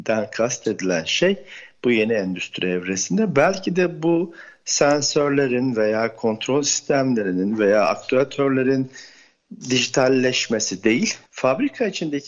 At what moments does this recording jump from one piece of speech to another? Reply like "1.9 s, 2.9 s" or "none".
11.3 s